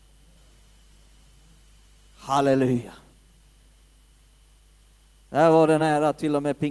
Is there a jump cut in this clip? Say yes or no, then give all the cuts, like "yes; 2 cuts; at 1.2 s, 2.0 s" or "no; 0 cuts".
no; 0 cuts